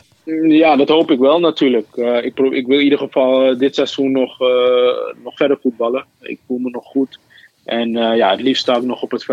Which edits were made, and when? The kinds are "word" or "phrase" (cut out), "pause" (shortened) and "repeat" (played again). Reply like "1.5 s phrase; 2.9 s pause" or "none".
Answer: none